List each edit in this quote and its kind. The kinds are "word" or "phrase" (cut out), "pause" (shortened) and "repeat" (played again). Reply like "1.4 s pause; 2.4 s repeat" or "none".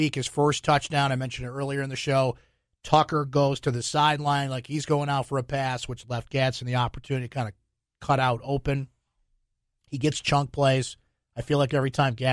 none